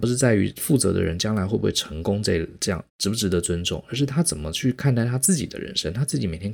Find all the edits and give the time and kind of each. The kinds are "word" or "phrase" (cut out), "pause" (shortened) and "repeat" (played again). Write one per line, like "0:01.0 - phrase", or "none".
0:02.9 - pause